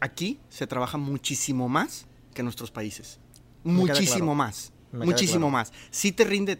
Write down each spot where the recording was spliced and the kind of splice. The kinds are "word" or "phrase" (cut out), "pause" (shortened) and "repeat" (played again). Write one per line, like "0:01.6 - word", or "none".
none